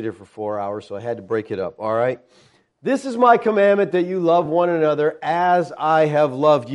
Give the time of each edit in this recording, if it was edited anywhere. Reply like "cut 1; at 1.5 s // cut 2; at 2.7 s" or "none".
none